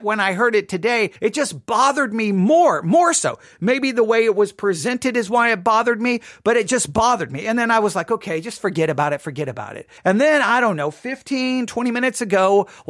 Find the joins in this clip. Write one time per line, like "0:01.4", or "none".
0:01.2
0:10.0

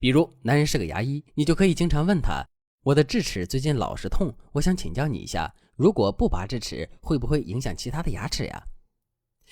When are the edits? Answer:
0:01.3

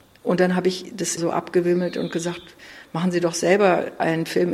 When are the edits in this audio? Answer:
0:01.2

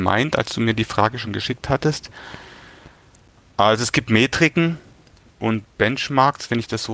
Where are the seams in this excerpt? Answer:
none

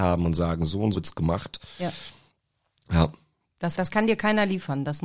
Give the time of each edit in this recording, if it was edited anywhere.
0:01.0
0:03.8

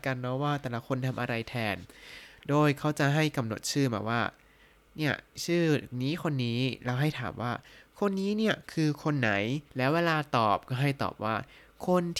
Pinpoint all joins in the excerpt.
0:09.7

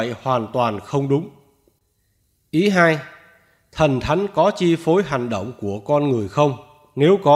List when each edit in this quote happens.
none

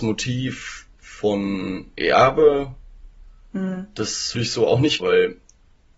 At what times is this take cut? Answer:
0:02.0
0:04.3
0:05.0

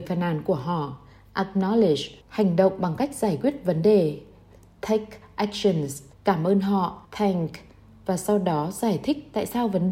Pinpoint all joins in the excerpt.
0:02.2
0:06.1
0:07.0

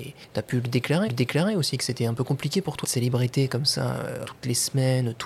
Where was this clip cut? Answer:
0:01.1
0:02.8
0:04.2

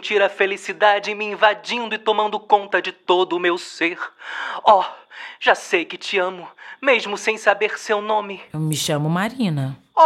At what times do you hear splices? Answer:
none

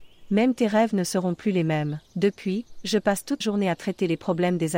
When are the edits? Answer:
0:02.1
0:03.4

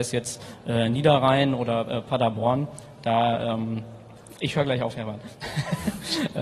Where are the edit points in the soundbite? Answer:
none

